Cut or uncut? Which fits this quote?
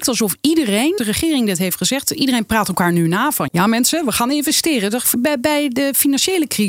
cut